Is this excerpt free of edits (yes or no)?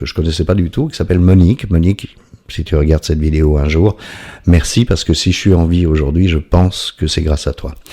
yes